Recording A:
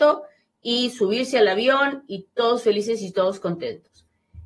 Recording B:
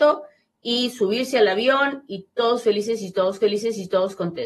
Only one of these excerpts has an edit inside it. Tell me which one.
B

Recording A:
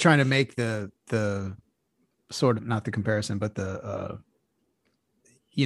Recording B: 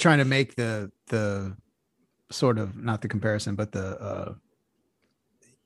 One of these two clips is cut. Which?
A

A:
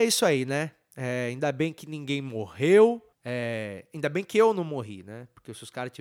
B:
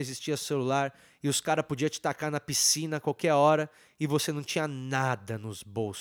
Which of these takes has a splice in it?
A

